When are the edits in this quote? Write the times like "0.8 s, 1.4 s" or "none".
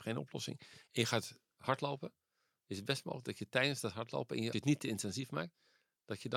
4.5 s